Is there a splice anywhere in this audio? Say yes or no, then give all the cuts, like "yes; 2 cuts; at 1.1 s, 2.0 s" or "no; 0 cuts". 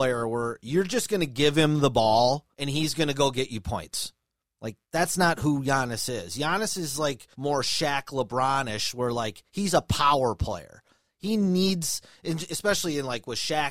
yes; 3 cuts; at 2.5 s, 4.8 s, 7.3 s